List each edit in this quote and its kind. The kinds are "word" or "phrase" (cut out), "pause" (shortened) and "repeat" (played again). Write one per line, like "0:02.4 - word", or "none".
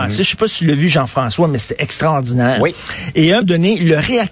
0:03.4 - word